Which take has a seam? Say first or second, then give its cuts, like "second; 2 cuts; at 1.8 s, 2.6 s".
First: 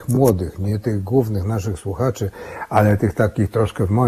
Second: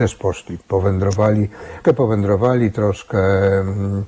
second; 1 cut; at 1.8 s